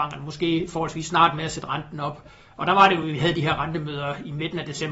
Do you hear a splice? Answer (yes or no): no